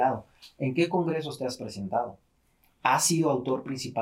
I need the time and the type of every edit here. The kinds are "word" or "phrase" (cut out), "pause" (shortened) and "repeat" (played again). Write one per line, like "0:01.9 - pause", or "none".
none